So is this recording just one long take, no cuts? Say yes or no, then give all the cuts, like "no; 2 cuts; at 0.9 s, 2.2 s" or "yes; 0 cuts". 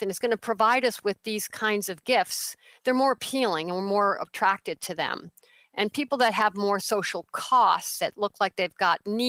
yes; 0 cuts